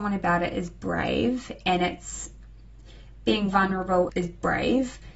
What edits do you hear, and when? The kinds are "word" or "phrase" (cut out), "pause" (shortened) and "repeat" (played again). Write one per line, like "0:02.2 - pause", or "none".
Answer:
0:04.1 - word